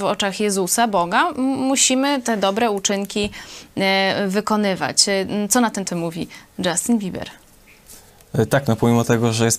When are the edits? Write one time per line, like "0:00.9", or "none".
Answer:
0:05.9